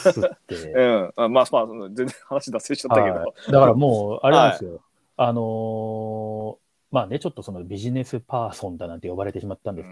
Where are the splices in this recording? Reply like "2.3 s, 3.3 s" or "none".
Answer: none